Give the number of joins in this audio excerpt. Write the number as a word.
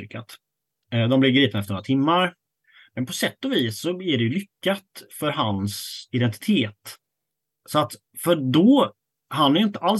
one